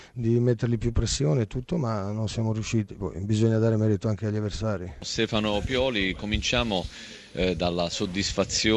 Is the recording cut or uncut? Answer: uncut